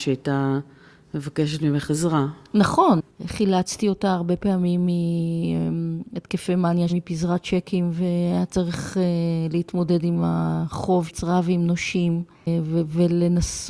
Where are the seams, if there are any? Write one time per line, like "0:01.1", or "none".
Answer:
0:06.9
0:11.1